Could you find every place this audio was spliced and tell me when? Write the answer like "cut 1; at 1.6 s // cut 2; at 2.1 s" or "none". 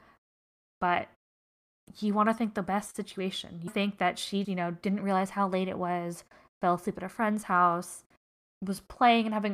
cut 1; at 3.7 s // cut 2; at 4.4 s